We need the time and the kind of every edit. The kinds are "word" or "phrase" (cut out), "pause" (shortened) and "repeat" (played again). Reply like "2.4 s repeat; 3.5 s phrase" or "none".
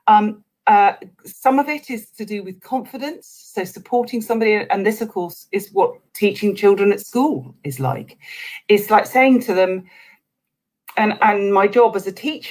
6.1 s pause